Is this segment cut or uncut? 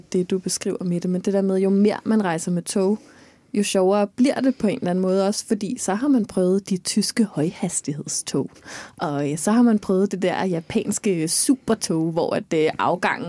uncut